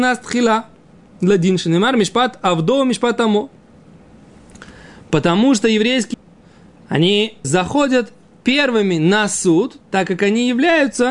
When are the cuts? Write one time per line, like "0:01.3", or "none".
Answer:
0:06.1
0:07.4